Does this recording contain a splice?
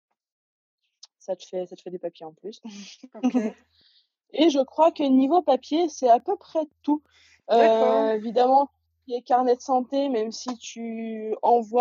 no; 0 cuts

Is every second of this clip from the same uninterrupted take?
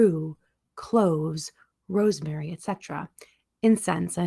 yes; 0 cuts

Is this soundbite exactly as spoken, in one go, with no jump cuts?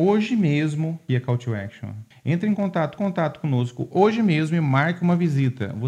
no; 3 cuts; at 1.1 s, 2.1 s, 3.0 s

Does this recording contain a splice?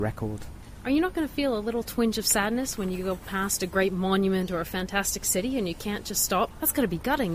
no; 0 cuts

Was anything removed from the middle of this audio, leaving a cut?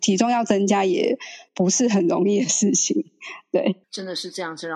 yes; 2 cuts; at 1.5 s, 3.8 s

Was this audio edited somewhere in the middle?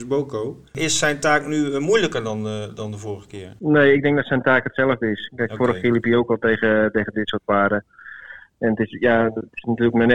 no; 0 cuts

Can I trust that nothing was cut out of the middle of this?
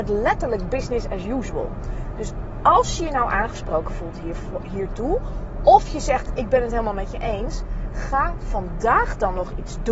yes; 0 cuts

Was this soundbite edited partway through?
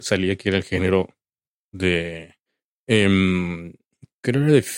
no; 0 cuts

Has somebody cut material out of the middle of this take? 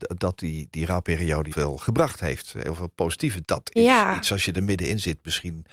yes; 2 cuts; at 1.5 s, 3.4 s

